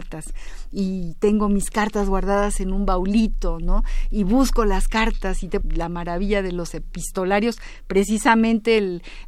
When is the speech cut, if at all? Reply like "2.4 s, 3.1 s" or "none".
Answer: 5.6 s